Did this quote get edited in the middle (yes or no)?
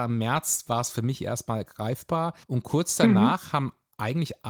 yes